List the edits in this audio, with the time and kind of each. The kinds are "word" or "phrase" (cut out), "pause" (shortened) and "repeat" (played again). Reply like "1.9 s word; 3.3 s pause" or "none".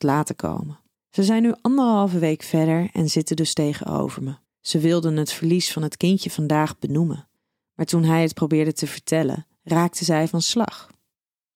0.9 s pause; 4.4 s pause